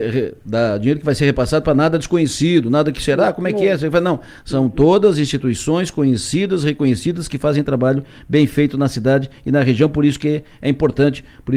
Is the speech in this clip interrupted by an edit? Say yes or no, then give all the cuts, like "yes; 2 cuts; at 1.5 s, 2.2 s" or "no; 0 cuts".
no; 0 cuts